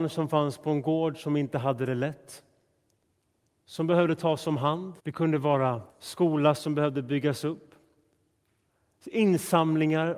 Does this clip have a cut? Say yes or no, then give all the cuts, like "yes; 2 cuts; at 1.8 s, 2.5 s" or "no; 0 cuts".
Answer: yes; 3 cuts; at 3.4 s, 5.0 s, 5.9 s